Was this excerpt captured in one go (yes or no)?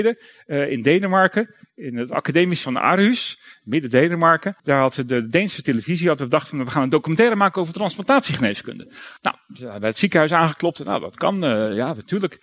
no